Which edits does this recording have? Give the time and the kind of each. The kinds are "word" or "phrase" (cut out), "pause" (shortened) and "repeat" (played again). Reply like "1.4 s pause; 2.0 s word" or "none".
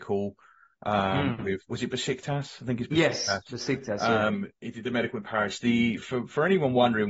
6.0 s word